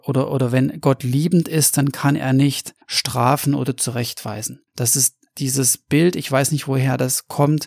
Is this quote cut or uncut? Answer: cut